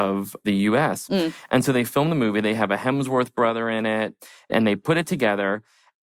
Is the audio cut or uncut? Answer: uncut